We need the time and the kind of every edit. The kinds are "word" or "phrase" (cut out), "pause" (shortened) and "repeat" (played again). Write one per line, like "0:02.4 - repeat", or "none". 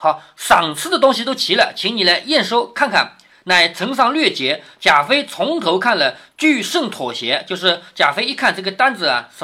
none